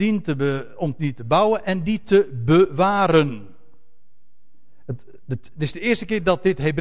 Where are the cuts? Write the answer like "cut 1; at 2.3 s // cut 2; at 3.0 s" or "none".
none